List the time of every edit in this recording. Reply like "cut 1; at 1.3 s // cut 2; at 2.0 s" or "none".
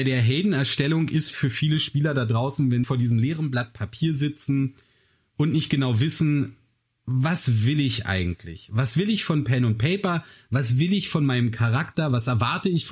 cut 1; at 1.3 s // cut 2; at 2.8 s

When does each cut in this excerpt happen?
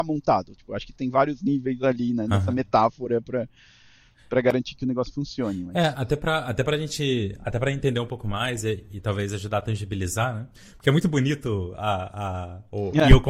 none

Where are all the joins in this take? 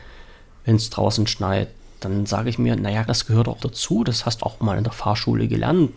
cut 1; at 3.1 s // cut 2; at 3.6 s // cut 3; at 4.4 s

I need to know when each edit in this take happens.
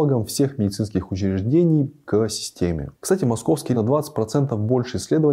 cut 1; at 2.1 s // cut 2; at 3.7 s

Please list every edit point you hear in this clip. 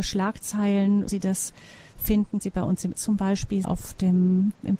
cut 1; at 1.1 s // cut 2; at 2.4 s // cut 3; at 2.9 s // cut 4; at 3.6 s

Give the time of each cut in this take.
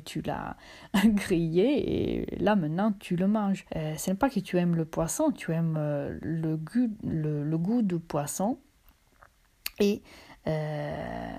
cut 1; at 3.7 s

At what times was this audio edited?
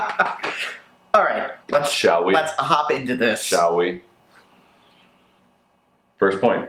cut 1; at 1.6 s

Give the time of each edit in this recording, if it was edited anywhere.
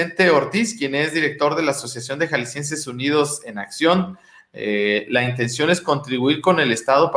none

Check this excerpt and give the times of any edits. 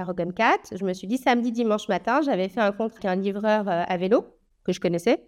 cut 1; at 3.0 s

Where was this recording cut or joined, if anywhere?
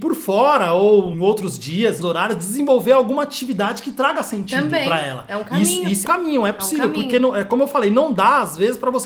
cut 1; at 1.1 s // cut 2; at 2.0 s // cut 3; at 6.0 s

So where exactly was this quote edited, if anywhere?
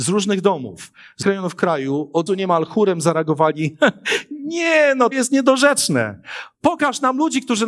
cut 1; at 1.2 s // cut 2; at 2.3 s // cut 3; at 5.1 s

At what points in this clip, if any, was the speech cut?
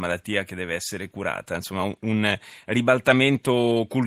none

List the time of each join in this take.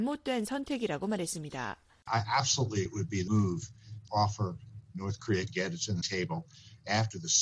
cut 1; at 2.9 s // cut 2; at 3.3 s // cut 3; at 4.1 s // cut 4; at 5.5 s // cut 5; at 6.0 s

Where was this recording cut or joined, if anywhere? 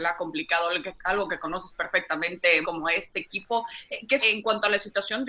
cut 1; at 2.6 s // cut 2; at 4.2 s

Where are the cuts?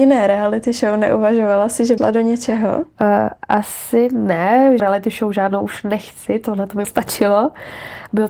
cut 1; at 2.0 s // cut 2; at 4.8 s // cut 3; at 6.8 s

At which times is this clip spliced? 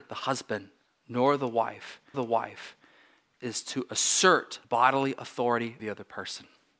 cut 1; at 2.1 s // cut 2; at 4.6 s // cut 3; at 5.8 s

